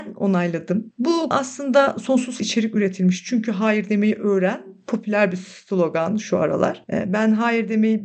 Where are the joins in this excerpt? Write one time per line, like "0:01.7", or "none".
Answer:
0:01.3
0:02.4